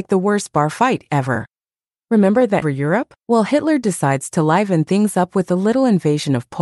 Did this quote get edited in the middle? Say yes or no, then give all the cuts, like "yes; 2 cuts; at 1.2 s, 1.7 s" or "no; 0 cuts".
yes; 2 cuts; at 2.6 s, 3.2 s